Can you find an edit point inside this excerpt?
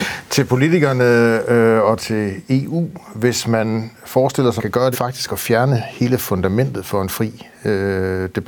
yes; 3 cuts; at 2.0 s, 4.6 s, 4.9 s

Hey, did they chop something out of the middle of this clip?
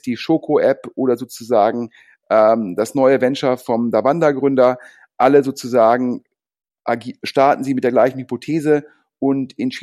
no; 0 cuts

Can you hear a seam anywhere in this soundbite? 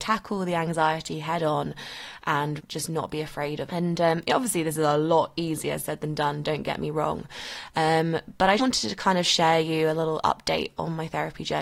yes; 3 cuts; at 2.6 s, 3.7 s, 8.6 s

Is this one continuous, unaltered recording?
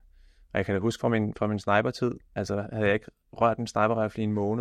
yes; 0 cuts

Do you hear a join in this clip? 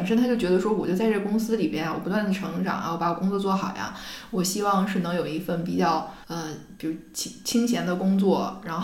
yes; 1 cut; at 6.2 s

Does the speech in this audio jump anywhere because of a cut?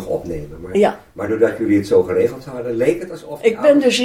no; 0 cuts

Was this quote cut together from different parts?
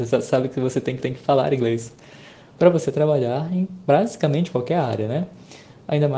yes; 1 cut; at 1.0 s

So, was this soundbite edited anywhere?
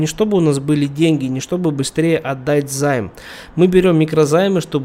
no; 0 cuts

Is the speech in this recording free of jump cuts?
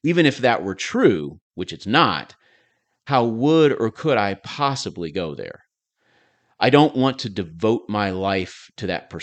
yes; 0 cuts

